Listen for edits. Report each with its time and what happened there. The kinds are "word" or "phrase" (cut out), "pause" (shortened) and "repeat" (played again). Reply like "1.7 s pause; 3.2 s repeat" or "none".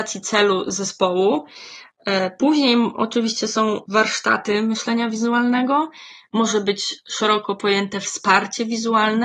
none